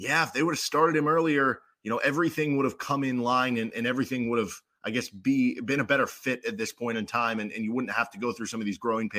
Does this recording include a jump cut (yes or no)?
no